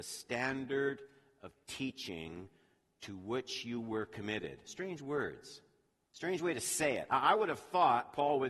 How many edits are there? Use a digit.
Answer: 1